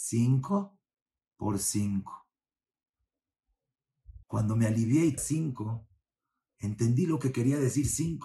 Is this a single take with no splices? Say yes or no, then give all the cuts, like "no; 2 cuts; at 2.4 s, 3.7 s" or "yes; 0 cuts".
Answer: no; 2 cuts; at 4.2 s, 5.2 s